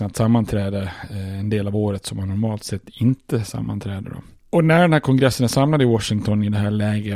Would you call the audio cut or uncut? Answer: uncut